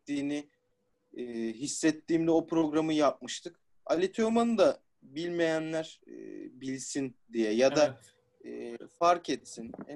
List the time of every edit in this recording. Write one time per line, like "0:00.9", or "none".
none